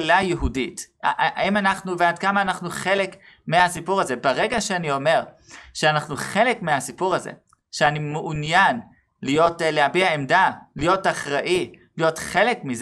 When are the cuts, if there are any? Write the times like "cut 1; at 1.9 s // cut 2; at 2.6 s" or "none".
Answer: none